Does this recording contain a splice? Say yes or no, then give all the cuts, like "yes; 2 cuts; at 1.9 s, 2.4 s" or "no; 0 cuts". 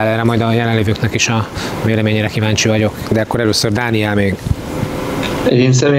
no; 0 cuts